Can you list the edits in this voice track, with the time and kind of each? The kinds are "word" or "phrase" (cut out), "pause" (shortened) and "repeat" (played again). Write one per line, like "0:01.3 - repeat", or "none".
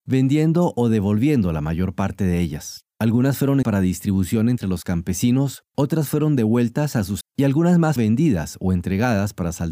0:02.9 - pause
0:03.6 - word
0:05.7 - pause
0:07.2 - phrase
0:08.0 - word